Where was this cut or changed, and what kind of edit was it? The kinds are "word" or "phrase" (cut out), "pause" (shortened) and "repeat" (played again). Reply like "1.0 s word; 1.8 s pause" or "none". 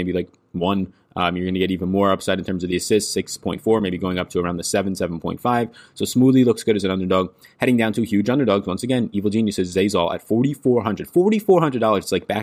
none